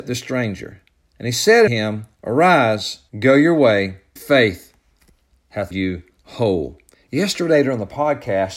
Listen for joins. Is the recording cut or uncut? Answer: cut